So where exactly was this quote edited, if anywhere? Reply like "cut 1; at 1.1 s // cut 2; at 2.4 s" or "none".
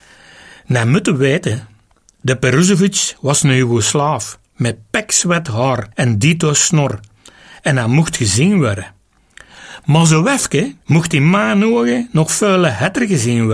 cut 1; at 5.9 s // cut 2; at 10.8 s